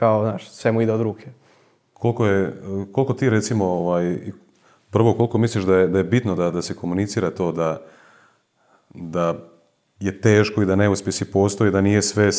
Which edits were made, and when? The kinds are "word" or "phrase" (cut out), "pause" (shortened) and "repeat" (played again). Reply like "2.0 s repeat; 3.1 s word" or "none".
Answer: none